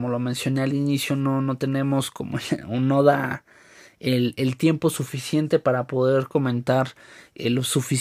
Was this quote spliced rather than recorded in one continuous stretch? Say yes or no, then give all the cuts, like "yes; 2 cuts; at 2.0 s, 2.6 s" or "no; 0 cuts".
no; 0 cuts